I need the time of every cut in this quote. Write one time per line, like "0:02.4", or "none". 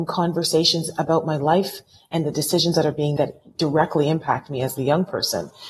0:03.2